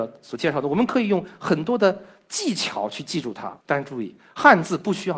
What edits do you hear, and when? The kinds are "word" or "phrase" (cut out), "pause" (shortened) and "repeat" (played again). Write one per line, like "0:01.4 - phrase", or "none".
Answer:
0:03.6 - pause